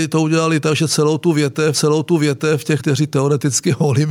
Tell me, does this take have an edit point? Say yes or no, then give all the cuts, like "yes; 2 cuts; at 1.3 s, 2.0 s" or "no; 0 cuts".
yes; 2 cuts; at 1.7 s, 2.8 s